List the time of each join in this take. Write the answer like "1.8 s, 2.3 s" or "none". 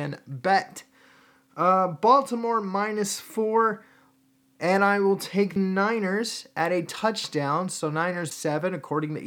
5.6 s, 8.3 s